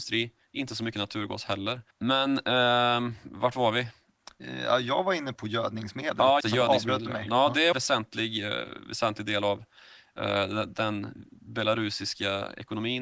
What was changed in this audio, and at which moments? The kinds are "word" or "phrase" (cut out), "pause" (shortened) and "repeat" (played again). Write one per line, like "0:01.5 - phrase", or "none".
0:01.9 - pause
0:05.3 - word
0:06.4 - word
0:07.7 - phrase
0:11.4 - pause

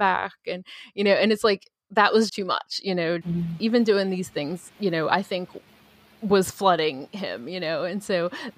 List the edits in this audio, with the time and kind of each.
0:02.3 - word
0:03.2 - word
0:04.8 - pause

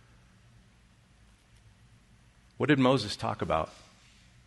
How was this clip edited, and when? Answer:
none

